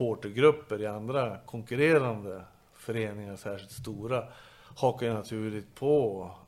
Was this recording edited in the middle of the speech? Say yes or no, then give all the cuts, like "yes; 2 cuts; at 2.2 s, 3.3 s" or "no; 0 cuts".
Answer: no; 0 cuts